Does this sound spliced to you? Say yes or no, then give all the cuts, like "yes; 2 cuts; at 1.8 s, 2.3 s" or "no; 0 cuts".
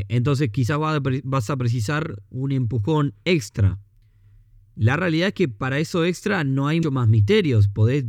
yes; 1 cut; at 6.8 s